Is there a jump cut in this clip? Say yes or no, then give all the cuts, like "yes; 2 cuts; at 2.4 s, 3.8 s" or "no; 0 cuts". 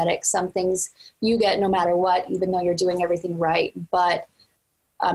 no; 0 cuts